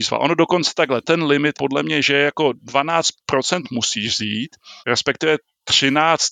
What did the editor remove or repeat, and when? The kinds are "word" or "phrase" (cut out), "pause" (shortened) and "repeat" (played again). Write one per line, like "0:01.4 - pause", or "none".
0:01.0 - word
0:01.5 - word
0:04.8 - pause